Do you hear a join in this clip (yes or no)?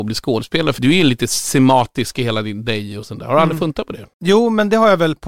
yes